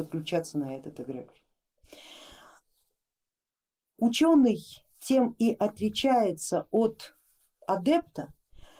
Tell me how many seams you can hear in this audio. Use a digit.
0